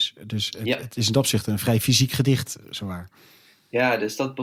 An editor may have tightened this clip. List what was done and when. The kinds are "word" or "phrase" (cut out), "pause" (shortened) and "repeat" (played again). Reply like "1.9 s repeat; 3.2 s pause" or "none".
none